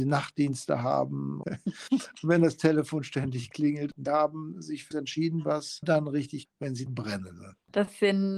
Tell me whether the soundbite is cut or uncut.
cut